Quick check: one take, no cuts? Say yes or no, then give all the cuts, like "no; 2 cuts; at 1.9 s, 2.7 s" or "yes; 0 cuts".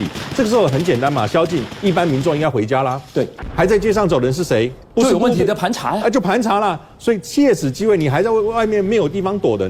no; 1 cut; at 4.8 s